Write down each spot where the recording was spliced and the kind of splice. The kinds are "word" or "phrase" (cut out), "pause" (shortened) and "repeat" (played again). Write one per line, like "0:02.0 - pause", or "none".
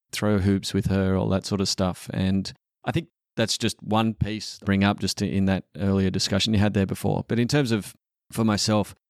0:04.6 - phrase